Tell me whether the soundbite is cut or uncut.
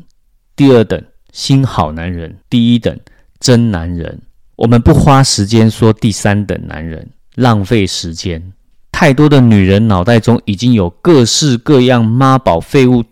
cut